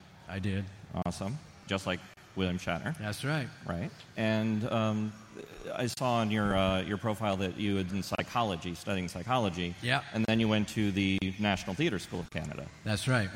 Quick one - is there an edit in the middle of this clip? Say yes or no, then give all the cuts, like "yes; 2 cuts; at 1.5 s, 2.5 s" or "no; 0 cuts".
yes; 2 cuts; at 1.7 s, 7.9 s